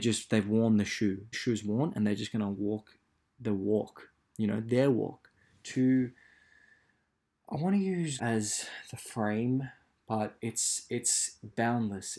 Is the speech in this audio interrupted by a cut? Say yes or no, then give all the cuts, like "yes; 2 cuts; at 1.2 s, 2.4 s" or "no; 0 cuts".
yes; 2 cuts; at 1.3 s, 8.2 s